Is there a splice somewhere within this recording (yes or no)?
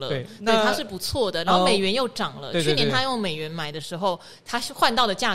no